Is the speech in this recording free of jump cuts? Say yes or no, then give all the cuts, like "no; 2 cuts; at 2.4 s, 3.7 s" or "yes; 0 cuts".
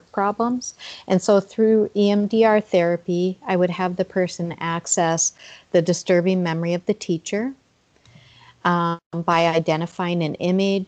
yes; 0 cuts